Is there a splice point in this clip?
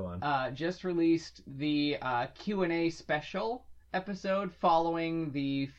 yes; 1 cut; at 3.8 s

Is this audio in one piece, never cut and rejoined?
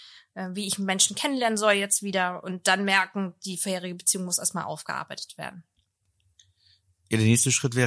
yes; 0 cuts

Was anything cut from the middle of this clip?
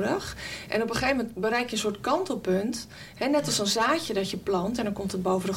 no; 0 cuts

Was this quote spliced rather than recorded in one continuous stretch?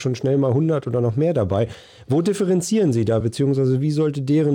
no; 0 cuts

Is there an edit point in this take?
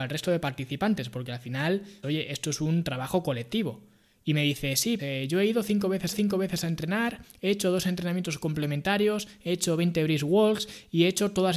yes; 3 cuts; at 2.0 s, 5.0 s, 6.1 s

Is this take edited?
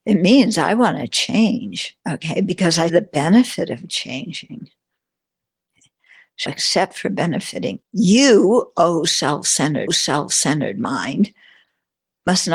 yes; 5 cuts; at 2.0 s, 2.9 s, 6.5 s, 7.8 s, 9.9 s

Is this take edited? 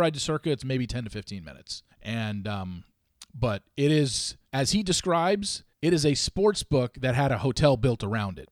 yes; 3 cuts; at 1.9 s, 4.5 s, 5.7 s

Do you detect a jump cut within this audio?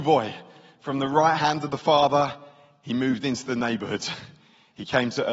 no; 0 cuts

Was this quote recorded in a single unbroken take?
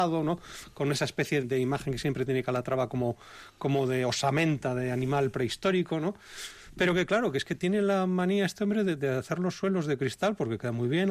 no; 1 cut; at 1.4 s

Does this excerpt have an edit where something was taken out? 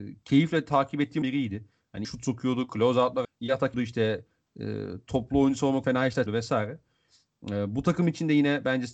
yes; 6 cuts; at 1.2 s, 2.0 s, 3.2 s, 3.7 s, 5.8 s, 6.3 s

